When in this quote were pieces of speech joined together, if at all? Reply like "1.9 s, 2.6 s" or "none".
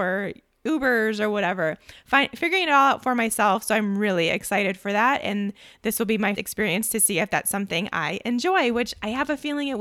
6.4 s